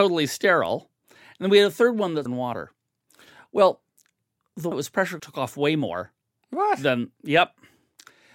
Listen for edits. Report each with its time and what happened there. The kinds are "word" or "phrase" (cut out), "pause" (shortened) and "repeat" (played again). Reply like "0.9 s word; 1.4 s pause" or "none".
2.3 s word; 4.7 s word; 5.2 s word